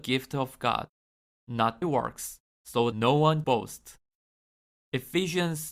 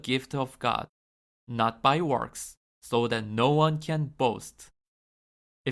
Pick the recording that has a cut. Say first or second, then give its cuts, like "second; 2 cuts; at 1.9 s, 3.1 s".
first; 3 cuts; at 1.8 s, 2.9 s, 3.4 s